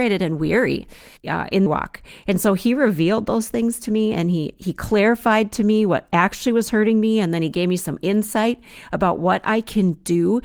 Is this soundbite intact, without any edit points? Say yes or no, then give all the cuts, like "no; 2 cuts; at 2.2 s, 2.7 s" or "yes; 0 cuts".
no; 2 cuts; at 1.2 s, 1.7 s